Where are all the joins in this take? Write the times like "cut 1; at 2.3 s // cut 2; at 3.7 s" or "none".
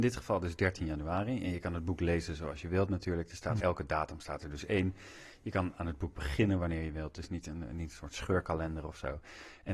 cut 1; at 3.6 s